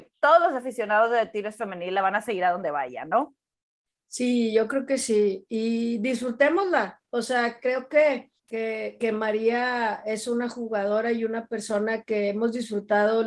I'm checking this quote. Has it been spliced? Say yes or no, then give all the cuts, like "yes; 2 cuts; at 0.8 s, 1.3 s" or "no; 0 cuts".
yes; 2 cuts; at 3.6 s, 8.4 s